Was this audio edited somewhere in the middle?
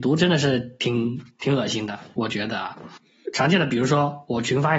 no; 0 cuts

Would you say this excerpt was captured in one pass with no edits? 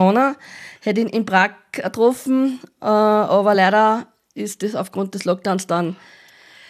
yes; 0 cuts

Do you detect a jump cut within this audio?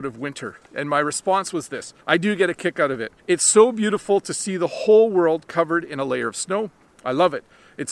yes; 2 cuts; at 2.0 s, 3.2 s

